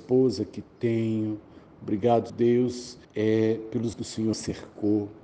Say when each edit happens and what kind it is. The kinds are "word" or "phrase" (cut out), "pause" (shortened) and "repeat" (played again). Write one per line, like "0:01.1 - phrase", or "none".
0:02.3 - word
0:03.0 - pause
0:03.9 - word
0:04.3 - word